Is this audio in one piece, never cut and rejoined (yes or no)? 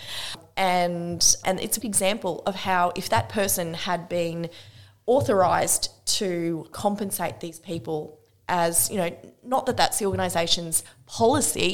no